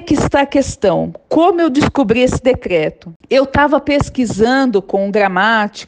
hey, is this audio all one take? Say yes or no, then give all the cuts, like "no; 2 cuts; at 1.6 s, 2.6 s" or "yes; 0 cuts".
yes; 0 cuts